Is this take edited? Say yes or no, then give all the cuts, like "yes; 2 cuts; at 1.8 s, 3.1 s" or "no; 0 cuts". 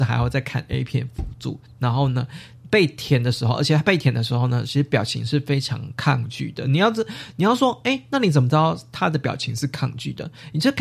no; 0 cuts